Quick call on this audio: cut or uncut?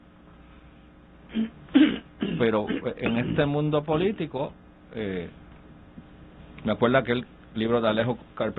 uncut